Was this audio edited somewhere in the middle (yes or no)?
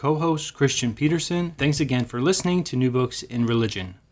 yes